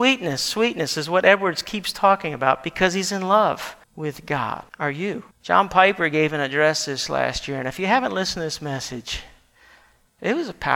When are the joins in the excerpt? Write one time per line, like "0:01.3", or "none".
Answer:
0:03.8
0:04.7
0:05.3